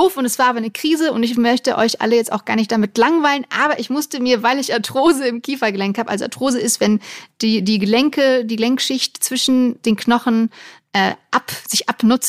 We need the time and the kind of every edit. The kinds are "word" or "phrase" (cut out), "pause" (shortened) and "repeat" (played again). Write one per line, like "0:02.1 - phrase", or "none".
none